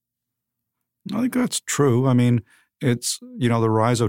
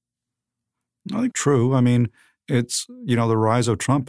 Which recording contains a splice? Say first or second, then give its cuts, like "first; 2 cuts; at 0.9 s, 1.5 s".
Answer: second; 1 cut; at 1.3 s